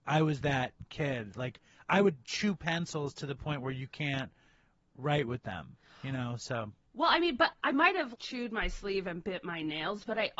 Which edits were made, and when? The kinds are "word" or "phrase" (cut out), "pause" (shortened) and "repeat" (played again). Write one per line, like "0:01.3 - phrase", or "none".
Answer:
0:07.5 - word
0:08.1 - word